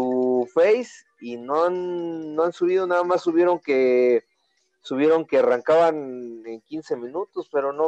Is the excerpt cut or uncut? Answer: uncut